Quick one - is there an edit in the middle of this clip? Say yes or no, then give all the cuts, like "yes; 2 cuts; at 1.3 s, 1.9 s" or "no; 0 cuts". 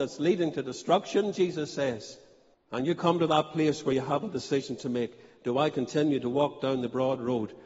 yes; 1 cut; at 2.5 s